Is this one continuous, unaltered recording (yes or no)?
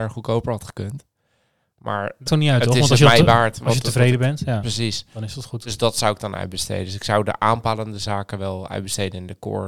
no